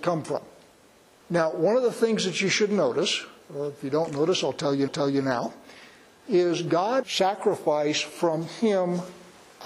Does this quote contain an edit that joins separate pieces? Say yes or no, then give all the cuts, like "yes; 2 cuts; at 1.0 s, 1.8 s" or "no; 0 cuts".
yes; 2 cuts; at 4.9 s, 7.0 s